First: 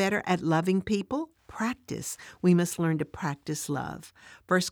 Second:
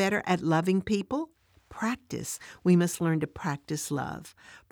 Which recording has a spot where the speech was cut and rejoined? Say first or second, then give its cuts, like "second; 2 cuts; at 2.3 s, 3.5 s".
first; 1 cut; at 1.4 s